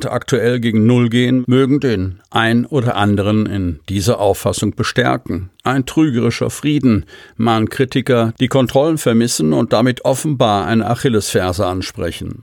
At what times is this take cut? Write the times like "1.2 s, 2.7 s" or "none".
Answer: 5.5 s

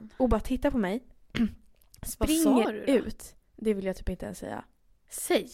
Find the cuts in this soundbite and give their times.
none

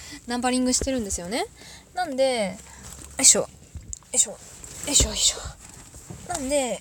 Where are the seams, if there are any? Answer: 4.0 s

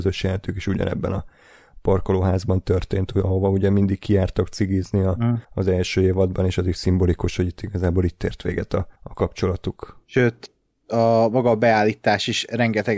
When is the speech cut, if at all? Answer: 5.4 s, 9.0 s, 10.0 s

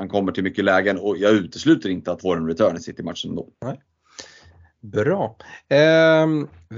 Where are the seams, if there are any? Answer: 2.2 s, 3.5 s

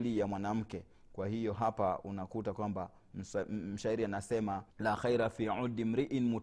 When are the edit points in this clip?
4.7 s

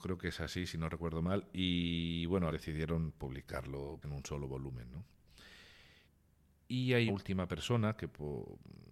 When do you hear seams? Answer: 2.5 s, 4.0 s, 6.0 s, 7.1 s

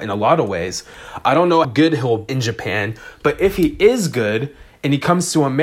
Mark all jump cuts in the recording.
1.6 s, 2.3 s

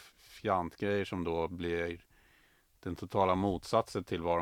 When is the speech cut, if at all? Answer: none

